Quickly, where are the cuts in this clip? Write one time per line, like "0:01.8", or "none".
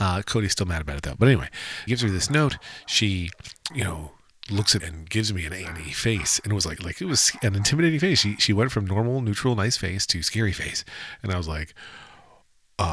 0:01.9
0:03.7
0:04.8
0:06.8